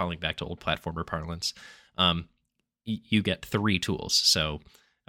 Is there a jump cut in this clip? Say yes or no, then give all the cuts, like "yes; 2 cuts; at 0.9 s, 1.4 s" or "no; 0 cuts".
no; 0 cuts